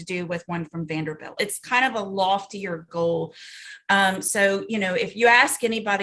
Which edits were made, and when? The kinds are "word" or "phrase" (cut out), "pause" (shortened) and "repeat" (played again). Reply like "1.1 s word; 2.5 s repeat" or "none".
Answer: 1.4 s word